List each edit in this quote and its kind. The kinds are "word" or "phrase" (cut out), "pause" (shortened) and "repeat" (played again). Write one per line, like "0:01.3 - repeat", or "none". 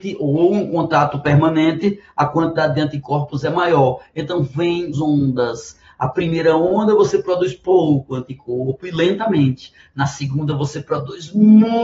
0:04.9 - word